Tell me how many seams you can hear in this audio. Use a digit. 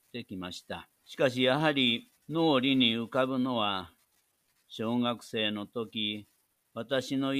2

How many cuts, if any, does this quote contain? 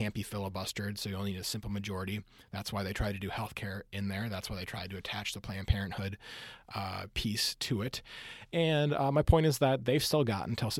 0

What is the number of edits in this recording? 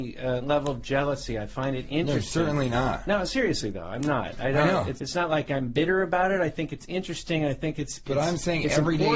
1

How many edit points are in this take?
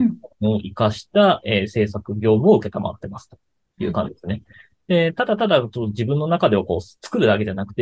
0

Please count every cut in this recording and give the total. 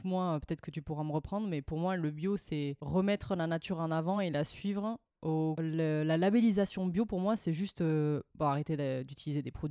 0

